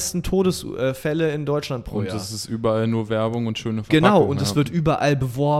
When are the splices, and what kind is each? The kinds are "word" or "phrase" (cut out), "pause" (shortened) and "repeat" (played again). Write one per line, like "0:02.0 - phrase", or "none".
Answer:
none